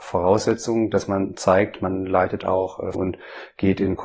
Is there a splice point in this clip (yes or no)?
yes